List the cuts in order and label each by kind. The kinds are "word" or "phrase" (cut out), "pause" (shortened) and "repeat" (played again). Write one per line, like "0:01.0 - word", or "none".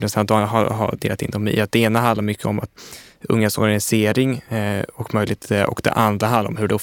none